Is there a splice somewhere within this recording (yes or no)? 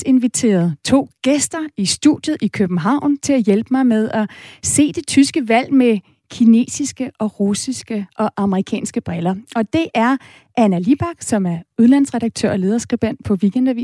no